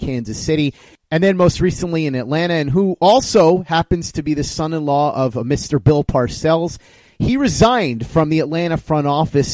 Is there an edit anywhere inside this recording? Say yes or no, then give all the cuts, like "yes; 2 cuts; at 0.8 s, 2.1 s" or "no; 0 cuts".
no; 0 cuts